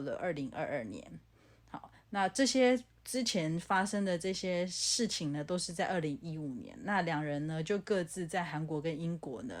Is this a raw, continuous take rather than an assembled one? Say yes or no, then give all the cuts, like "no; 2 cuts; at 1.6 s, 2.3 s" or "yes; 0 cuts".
yes; 0 cuts